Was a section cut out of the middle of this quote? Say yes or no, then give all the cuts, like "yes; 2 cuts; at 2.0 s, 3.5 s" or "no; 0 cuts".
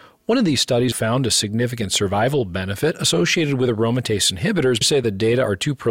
yes; 2 cuts; at 0.9 s, 4.8 s